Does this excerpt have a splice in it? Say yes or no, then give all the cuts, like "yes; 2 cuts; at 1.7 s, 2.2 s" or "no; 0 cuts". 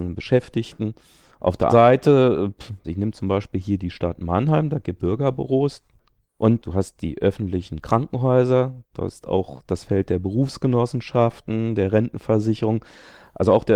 yes; 3 cuts; at 1.7 s, 2.8 s, 5.0 s